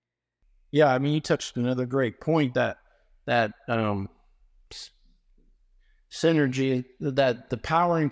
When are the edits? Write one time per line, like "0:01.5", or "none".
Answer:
none